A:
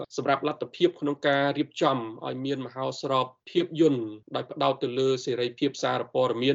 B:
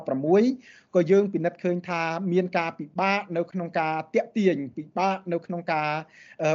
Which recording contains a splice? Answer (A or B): A